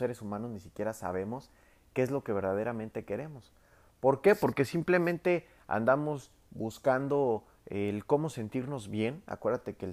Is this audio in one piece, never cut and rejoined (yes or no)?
yes